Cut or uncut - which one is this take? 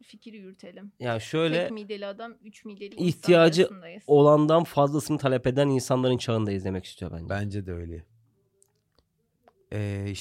uncut